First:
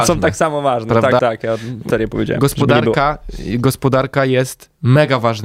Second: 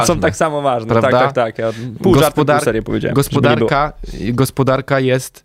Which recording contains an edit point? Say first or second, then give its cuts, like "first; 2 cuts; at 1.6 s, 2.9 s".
first; 2 cuts; at 1.2 s, 1.9 s